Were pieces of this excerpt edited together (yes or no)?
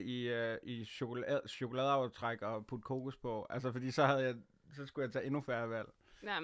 no